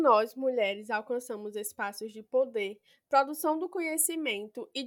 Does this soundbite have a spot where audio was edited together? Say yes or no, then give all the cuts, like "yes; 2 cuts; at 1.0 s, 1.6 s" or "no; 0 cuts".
no; 0 cuts